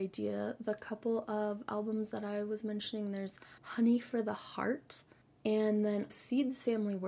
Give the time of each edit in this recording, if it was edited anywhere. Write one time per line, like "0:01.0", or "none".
0:03.6
0:05.2
0:06.1